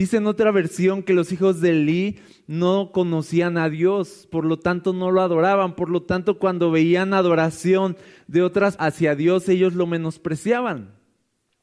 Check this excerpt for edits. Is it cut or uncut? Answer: cut